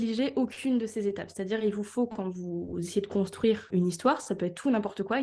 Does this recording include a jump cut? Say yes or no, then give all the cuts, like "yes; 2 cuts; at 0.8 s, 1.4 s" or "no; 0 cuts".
no; 0 cuts